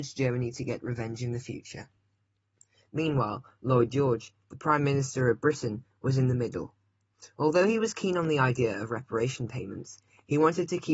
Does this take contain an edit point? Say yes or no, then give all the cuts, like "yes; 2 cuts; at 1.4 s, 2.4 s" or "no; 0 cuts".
no; 0 cuts